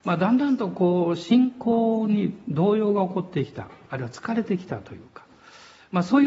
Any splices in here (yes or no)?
no